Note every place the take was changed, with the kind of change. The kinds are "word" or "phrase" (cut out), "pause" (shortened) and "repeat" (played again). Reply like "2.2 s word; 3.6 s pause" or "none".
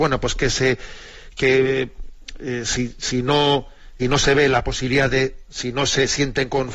4.0 s phrase; 5.5 s word